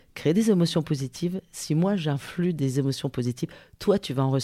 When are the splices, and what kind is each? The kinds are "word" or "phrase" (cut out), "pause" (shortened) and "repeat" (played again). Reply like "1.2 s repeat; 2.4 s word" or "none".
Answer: none